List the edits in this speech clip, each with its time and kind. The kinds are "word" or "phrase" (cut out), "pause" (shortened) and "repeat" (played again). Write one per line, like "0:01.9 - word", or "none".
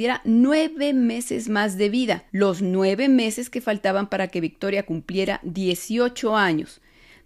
0:02.3 - pause